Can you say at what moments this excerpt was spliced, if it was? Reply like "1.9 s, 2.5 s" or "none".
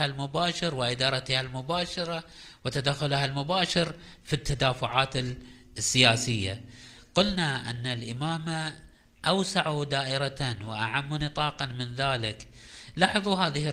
none